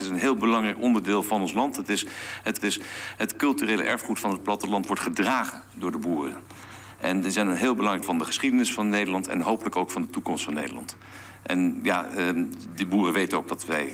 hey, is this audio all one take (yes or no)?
no